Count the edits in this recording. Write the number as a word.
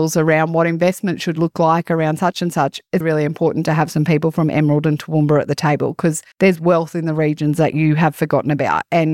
two